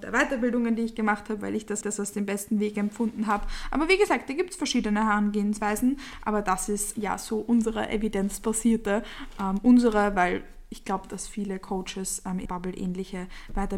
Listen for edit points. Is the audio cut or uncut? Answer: cut